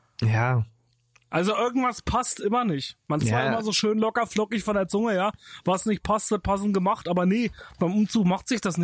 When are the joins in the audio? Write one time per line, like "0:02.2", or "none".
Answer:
0:03.2